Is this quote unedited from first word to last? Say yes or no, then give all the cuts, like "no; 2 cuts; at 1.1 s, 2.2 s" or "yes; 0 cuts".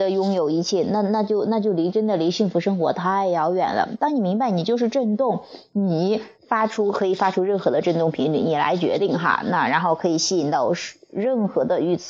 no; 1 cut; at 6.4 s